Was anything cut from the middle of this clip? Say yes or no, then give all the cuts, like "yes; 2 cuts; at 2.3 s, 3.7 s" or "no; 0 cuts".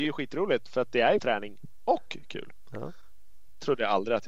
yes; 1 cut; at 1.2 s